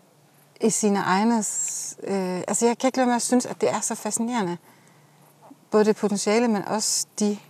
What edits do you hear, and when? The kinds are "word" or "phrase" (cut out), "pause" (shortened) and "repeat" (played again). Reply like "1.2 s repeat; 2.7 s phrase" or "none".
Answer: none